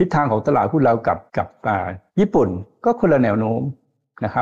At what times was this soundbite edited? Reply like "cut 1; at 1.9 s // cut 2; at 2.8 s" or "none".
cut 1; at 1.3 s // cut 2; at 2.1 s